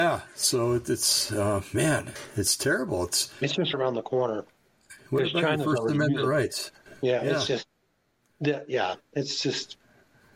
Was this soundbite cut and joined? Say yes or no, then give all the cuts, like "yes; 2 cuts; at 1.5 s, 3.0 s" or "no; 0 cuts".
yes; 1 cut; at 3.7 s